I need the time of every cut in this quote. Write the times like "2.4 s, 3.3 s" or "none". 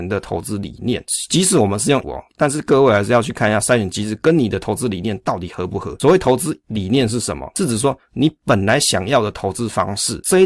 2.0 s